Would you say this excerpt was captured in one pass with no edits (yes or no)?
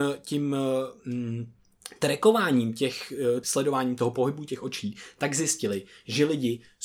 no